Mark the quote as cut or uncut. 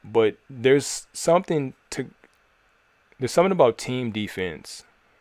uncut